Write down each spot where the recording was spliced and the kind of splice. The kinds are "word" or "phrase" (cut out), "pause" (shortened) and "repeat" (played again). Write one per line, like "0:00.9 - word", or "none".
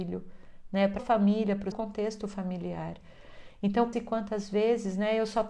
0:01.0 - word
0:01.7 - word
0:03.9 - word